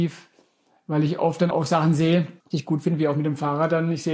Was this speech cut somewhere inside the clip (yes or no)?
yes